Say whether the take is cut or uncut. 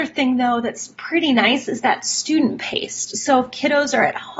uncut